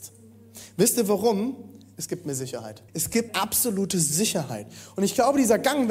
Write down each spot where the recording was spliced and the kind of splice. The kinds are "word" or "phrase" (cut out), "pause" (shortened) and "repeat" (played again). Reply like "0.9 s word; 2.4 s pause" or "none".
2.9 s pause; 3.3 s word